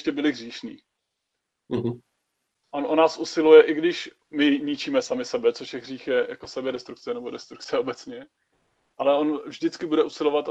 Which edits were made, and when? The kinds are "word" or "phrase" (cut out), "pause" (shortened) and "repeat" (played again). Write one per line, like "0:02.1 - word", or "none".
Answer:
none